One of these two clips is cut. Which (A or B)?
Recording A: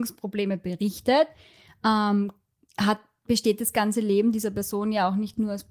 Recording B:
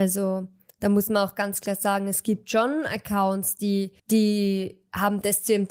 B